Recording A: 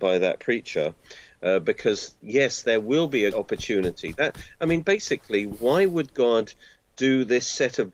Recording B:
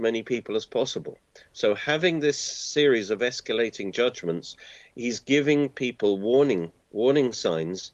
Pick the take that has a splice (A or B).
A